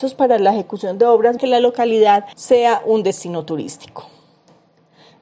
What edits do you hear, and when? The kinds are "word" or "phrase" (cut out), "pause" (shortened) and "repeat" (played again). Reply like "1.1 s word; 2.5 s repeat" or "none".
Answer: 1.4 s word; 2.3 s pause